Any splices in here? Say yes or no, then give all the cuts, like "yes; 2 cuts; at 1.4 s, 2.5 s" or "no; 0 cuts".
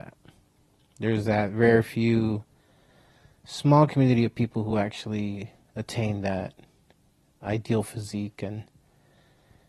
no; 0 cuts